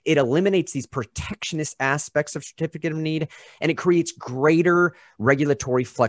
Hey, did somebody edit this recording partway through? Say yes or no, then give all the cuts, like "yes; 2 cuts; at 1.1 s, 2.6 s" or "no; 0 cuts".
no; 0 cuts